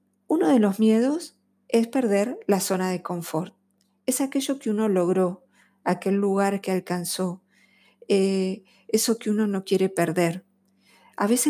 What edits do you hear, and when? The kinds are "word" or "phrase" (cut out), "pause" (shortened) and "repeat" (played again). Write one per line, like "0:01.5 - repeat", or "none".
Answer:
none